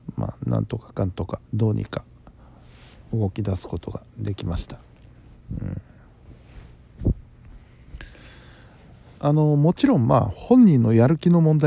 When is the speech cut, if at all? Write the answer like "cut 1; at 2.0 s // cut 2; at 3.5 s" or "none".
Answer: cut 1; at 1.4 s